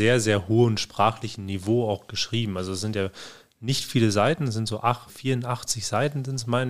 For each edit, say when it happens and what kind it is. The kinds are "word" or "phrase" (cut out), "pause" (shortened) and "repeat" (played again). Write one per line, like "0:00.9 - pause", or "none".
0:05.1 - word